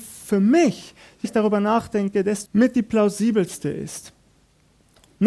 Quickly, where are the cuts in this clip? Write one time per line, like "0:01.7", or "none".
0:01.2
0:02.5